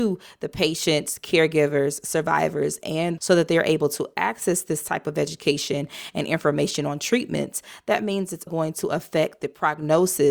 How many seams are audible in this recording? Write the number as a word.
two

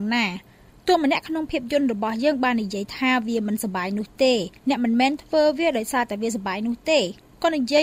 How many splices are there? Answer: one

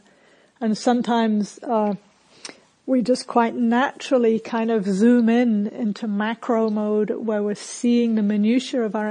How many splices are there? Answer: zero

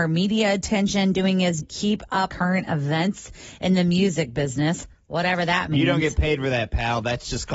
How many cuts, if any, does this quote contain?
two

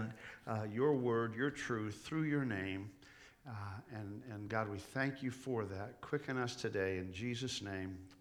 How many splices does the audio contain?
zero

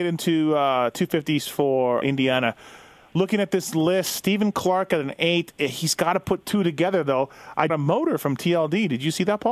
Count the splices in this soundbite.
two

